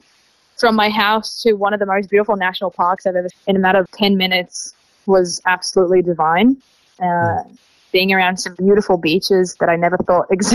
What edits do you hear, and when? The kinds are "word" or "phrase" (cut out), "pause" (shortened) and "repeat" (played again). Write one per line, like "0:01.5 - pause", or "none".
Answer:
0:03.3 - word
0:03.9 - word